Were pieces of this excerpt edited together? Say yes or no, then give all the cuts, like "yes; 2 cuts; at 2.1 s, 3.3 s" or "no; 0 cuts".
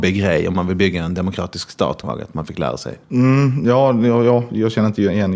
yes; 2 cuts; at 2.0 s, 3.0 s